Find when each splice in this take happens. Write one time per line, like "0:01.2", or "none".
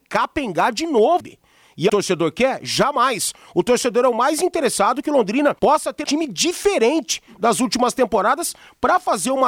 0:01.2
0:01.9
0:05.6
0:06.0